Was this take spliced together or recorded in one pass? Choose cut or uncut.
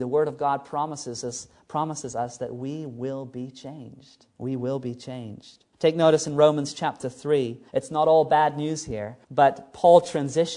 cut